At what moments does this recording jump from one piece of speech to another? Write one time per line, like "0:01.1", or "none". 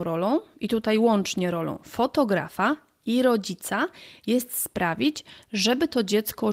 none